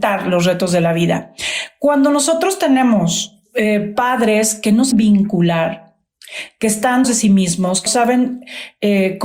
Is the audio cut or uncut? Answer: cut